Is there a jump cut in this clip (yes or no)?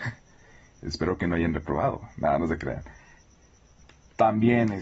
no